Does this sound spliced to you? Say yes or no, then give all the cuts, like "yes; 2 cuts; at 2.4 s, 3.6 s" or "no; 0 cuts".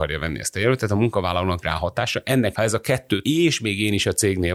yes; 3 cuts; at 1.6 s, 2.5 s, 3.2 s